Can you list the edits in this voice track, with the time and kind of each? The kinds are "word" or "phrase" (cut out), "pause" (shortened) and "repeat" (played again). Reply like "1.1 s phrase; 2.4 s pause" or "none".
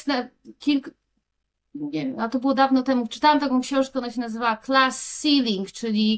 none